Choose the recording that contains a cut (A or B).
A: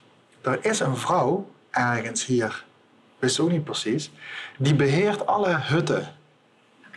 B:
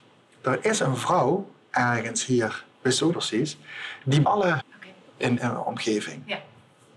B